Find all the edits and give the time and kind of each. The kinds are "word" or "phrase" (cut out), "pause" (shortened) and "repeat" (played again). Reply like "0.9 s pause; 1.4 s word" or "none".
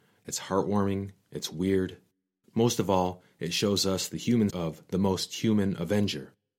4.5 s word